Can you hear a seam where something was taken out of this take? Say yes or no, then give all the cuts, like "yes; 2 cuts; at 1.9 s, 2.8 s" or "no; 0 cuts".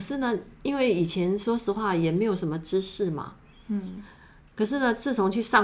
no; 0 cuts